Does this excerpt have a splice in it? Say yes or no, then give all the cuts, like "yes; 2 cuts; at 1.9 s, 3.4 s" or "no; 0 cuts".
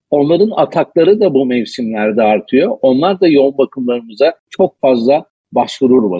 yes; 1 cut; at 4.4 s